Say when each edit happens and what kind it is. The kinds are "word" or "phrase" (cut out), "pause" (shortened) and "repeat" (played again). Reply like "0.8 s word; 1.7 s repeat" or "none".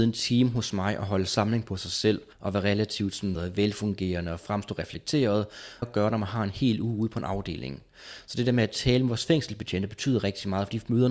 2.3 s pause; 3.4 s word; 5.8 s phrase